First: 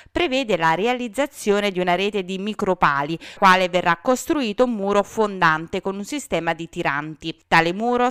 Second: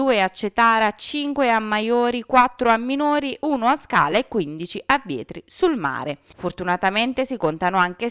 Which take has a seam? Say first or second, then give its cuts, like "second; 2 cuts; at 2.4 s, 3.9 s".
first; 1 cut; at 3.4 s